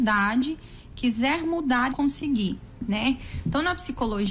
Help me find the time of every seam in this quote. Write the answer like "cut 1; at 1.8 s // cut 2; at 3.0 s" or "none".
cut 1; at 1.9 s